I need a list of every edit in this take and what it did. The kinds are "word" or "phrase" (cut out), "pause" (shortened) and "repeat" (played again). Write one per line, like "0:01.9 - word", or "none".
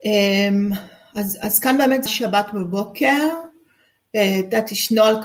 0:02.1 - word